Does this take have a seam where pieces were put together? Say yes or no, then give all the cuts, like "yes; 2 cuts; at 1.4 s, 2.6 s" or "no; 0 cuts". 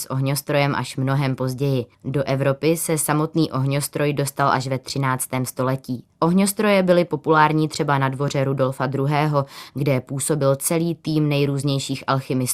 yes; 2 cuts; at 1.9 s, 6.1 s